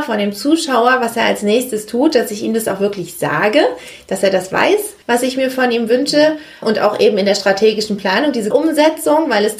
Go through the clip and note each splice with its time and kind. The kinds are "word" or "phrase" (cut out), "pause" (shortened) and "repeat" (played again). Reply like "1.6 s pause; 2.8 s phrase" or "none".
5.0 s pause; 6.6 s word; 8.5 s word